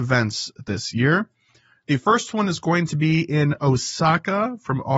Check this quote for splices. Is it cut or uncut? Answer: uncut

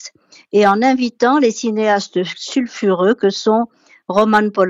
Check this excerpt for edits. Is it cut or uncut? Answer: uncut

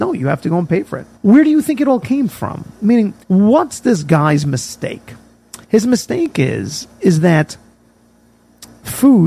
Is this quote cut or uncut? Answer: cut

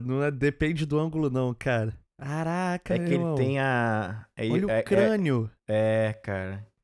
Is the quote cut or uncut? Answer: uncut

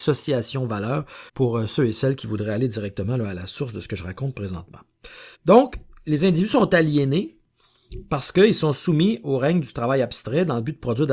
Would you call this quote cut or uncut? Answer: cut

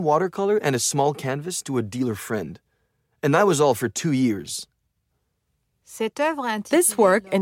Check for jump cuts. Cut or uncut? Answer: uncut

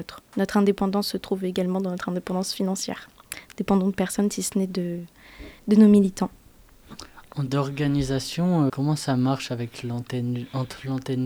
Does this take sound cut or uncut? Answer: cut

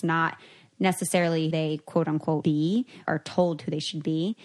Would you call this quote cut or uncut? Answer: cut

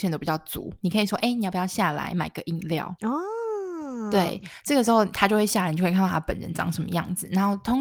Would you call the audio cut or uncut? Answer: uncut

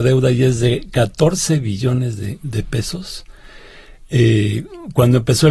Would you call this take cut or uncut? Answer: uncut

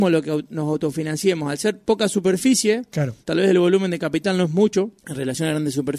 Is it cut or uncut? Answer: cut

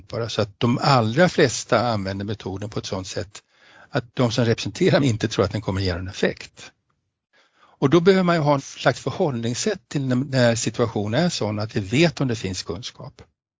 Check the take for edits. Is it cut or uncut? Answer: cut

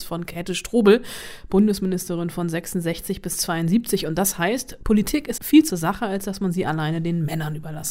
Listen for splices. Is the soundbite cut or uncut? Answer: cut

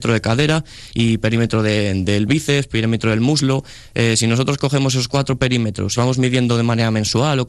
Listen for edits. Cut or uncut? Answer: cut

